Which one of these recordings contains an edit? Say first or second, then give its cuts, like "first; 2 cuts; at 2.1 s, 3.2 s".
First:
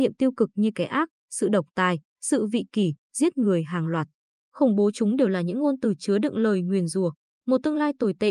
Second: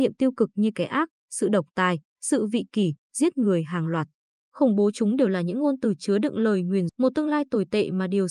second; 1 cut; at 6.9 s